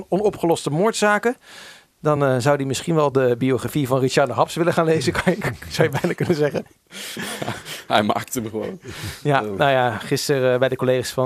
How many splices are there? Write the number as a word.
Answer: zero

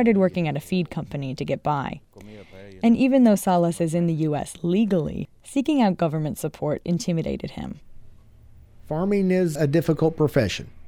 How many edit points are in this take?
one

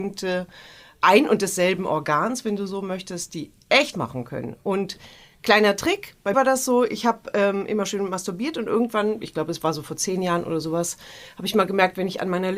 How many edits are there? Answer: two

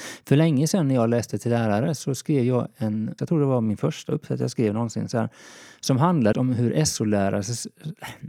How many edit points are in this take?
two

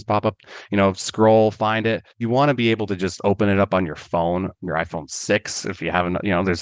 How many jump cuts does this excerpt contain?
two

